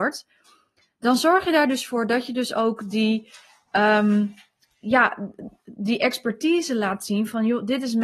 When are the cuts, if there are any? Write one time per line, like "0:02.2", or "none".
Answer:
none